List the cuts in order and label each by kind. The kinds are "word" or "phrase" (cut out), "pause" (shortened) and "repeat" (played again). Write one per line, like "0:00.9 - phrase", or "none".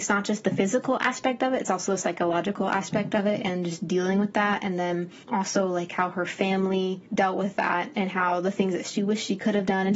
0:05.2 - pause
0:07.1 - pause